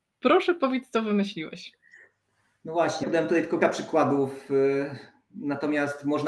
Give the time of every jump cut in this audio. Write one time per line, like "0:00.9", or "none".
0:03.0
0:03.6